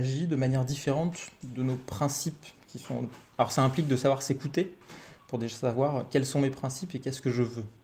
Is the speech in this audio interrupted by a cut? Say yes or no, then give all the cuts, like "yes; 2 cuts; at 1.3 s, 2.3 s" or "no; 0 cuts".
no; 0 cuts